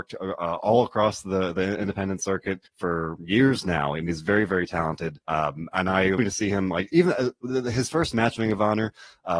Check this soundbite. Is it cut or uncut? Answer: cut